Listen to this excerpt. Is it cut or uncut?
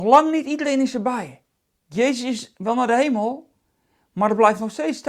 cut